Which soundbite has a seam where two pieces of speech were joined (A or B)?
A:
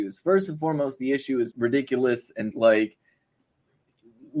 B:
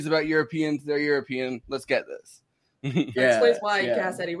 A